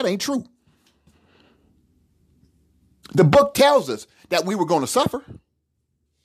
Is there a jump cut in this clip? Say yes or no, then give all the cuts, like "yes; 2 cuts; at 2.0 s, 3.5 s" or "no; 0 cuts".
no; 0 cuts